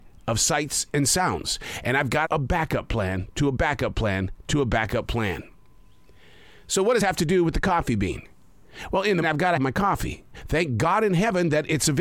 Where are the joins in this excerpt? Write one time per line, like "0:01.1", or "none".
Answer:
0:02.2
0:07.0
0:09.2
0:09.6

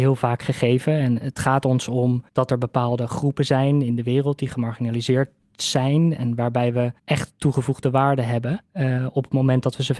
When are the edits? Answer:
0:02.3
0:07.0
0:08.6

